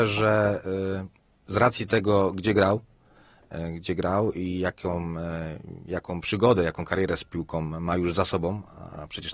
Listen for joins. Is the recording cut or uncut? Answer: uncut